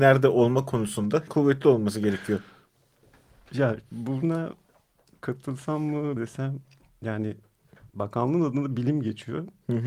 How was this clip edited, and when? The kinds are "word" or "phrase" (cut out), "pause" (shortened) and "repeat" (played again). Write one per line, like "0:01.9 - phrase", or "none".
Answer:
0:01.3 - word
0:06.2 - phrase
0:07.9 - pause